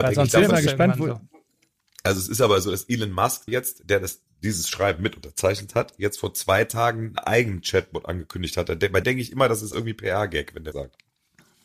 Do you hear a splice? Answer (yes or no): yes